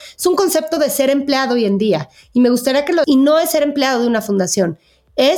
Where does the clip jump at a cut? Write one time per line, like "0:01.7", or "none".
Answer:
0:03.0